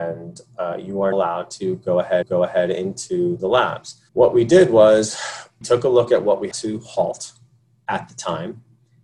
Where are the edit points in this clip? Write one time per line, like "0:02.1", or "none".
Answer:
0:01.1
0:02.2
0:04.1
0:05.6
0:06.5